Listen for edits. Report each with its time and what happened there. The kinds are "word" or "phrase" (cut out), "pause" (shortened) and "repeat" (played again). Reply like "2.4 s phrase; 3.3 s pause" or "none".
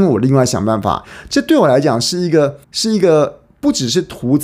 2.6 s pause